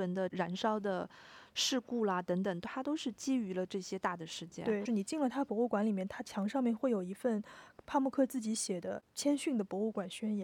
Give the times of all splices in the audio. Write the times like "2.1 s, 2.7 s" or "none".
4.8 s

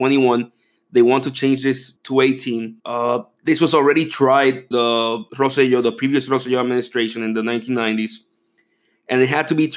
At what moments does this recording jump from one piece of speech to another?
2.0 s, 2.8 s, 4.7 s, 5.3 s

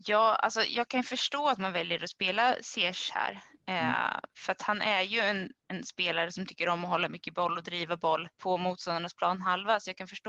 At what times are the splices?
8.3 s

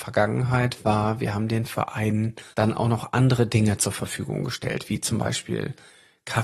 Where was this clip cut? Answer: 2.5 s

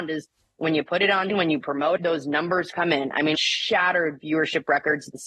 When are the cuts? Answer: 1.3 s, 2.0 s, 3.3 s

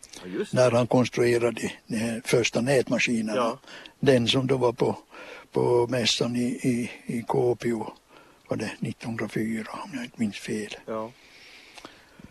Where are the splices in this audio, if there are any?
none

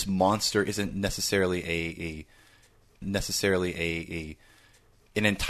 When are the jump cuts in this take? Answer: 3.0 s

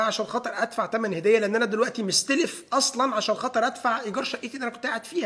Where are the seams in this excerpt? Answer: none

